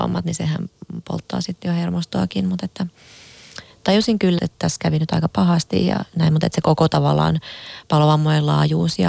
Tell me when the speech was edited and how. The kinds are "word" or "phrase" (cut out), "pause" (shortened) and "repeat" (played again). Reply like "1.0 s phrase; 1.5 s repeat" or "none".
4.4 s word; 6.1 s word